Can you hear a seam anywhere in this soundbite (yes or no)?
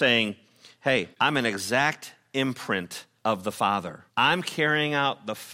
yes